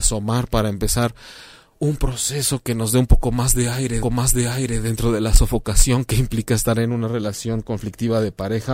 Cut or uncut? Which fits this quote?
cut